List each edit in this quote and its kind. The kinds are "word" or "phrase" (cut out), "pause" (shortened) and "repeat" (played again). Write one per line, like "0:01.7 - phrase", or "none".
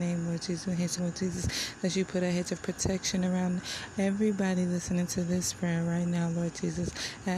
0:01.0 - phrase